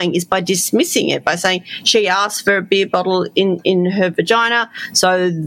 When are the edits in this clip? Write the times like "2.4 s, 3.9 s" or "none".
none

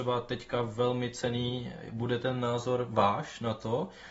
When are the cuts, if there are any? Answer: none

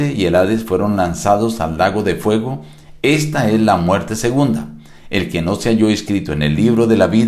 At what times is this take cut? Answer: none

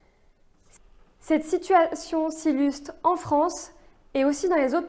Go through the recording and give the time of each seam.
none

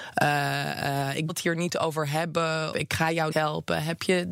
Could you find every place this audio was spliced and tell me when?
1.3 s, 2.7 s, 3.3 s

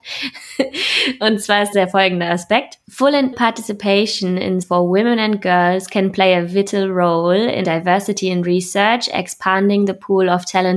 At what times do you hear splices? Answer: 1.7 s, 3.3 s, 4.6 s, 7.6 s

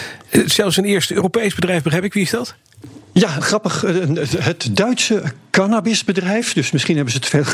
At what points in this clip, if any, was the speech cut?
3.4 s

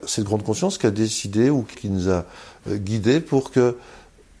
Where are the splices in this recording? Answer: 1.7 s

